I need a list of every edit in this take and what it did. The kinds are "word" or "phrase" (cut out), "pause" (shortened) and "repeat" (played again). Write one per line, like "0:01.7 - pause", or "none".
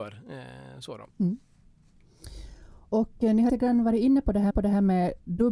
0:01.1 - pause
0:03.5 - word
0:04.5 - repeat